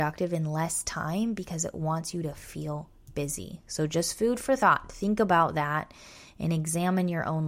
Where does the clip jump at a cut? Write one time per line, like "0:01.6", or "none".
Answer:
none